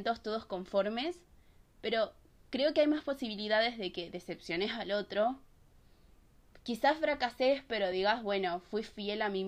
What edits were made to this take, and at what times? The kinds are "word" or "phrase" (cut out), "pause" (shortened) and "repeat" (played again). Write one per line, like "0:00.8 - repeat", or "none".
none